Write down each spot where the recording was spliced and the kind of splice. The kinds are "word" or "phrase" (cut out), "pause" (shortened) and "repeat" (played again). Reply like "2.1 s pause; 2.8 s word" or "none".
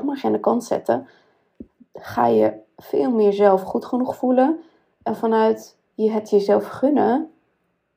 none